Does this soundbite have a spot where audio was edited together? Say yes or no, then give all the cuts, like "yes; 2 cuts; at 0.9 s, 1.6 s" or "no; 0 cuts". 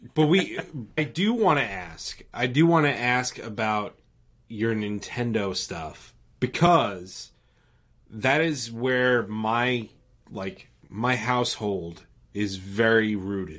yes; 1 cut; at 1.0 s